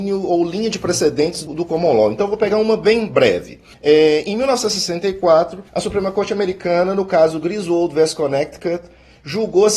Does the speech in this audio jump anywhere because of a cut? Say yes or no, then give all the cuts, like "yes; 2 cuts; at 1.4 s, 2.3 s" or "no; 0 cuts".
yes; 3 cuts; at 1.5 s, 3.7 s, 5.7 s